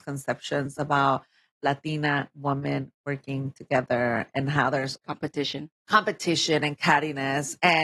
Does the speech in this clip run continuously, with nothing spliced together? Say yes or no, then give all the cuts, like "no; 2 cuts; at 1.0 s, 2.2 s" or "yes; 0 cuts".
no; 1 cut; at 5.0 s